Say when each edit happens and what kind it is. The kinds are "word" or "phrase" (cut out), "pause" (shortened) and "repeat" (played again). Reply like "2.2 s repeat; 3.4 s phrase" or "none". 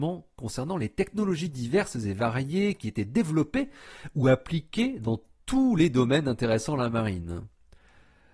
none